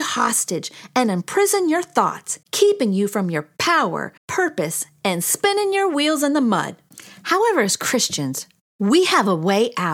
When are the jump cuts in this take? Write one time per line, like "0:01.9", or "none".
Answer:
0:02.4
0:04.2